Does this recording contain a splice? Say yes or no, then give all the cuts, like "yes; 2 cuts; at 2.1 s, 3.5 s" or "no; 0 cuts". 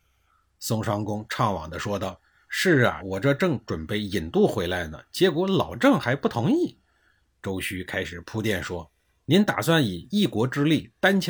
yes; 1 cut; at 3.0 s